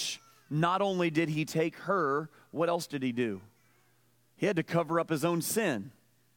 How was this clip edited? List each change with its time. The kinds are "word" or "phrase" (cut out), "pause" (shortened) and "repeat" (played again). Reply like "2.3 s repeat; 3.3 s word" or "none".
none